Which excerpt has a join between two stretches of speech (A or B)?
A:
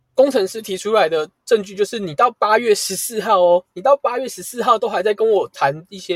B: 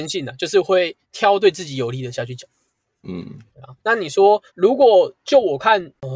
B